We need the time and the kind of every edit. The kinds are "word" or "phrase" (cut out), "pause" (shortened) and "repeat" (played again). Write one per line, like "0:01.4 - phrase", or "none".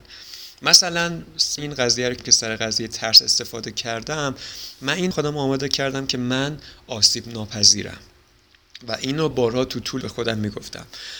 0:01.6 - word
0:02.2 - word
0:05.1 - phrase
0:09.3 - word
0:10.0 - word